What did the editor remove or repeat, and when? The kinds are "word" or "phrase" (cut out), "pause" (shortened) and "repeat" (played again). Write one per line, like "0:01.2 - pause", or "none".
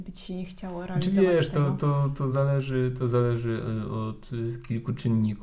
none